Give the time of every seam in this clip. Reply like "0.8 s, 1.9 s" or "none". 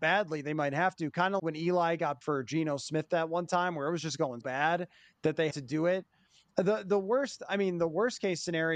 1.4 s, 2.2 s, 4.4 s, 5.5 s